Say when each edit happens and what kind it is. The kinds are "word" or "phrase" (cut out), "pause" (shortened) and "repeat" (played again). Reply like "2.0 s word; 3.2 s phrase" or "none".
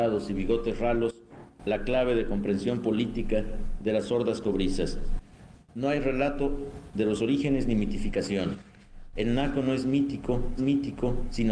10.6 s repeat